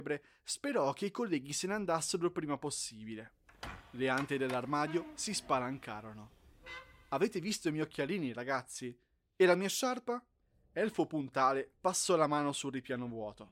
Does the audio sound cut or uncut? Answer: uncut